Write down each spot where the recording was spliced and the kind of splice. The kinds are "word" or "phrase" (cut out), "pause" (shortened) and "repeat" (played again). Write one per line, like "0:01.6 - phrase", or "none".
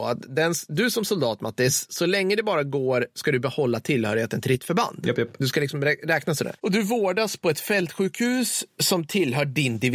none